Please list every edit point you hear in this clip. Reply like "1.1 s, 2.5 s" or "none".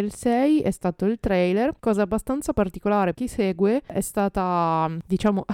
1.0 s, 1.8 s, 3.1 s